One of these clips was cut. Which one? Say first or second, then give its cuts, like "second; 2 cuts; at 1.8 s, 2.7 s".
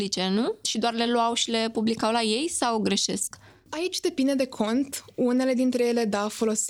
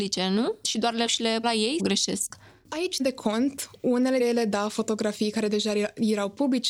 second; 6 cuts; at 1.1 s, 1.4 s, 1.8 s, 3.0 s, 4.2 s, 4.7 s